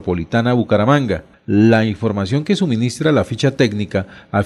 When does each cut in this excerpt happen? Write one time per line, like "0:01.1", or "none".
none